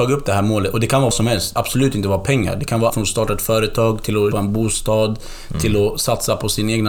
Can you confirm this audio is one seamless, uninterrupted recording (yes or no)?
no